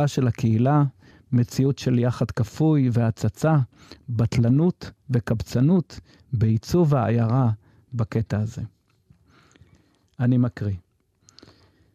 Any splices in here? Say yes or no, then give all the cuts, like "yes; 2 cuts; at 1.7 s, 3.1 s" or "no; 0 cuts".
no; 0 cuts